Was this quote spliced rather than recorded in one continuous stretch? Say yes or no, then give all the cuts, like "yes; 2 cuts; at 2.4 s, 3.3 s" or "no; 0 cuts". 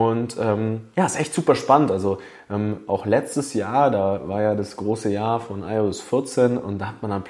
no; 0 cuts